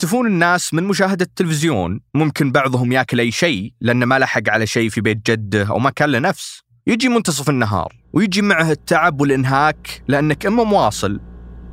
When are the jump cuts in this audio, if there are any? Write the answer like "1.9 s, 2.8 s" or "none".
2.1 s, 6.8 s, 8.0 s